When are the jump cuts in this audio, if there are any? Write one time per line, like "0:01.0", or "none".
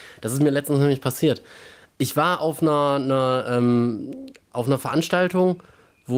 none

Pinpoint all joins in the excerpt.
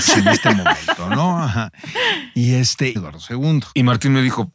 0:03.0

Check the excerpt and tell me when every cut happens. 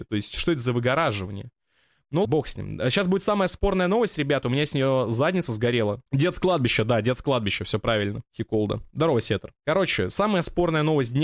0:02.2
0:06.1
0:08.3
0:09.6

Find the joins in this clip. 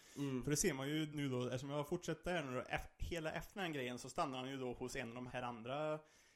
0:01.1
0:02.2
0:05.3

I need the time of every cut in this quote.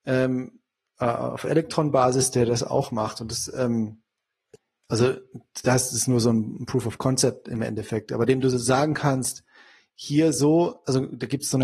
none

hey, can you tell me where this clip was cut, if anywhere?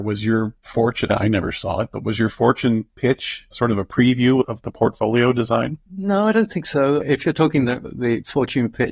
0:05.9

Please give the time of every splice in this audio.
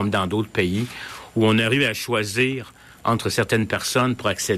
none

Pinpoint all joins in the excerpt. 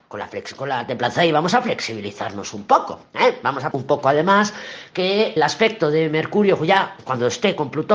0:03.7
0:05.4

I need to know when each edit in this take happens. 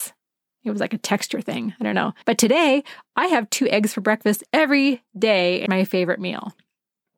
0:02.2
0:04.5
0:05.7

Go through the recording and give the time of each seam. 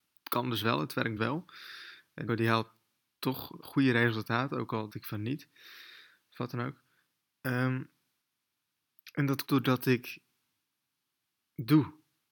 0:01.2
0:02.3
0:03.6
0:04.9
0:08.2
0:09.5

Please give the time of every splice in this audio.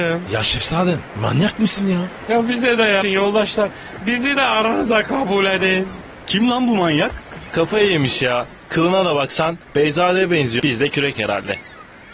0:03.0
0:10.6
0:11.1

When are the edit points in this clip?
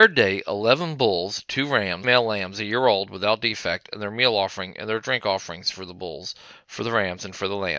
0:02.0

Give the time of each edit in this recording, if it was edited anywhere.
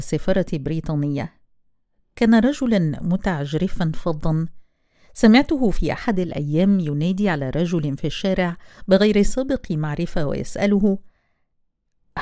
none

